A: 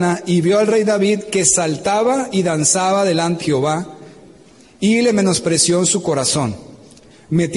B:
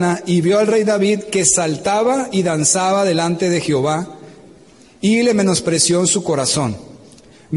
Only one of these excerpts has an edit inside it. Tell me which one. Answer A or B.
A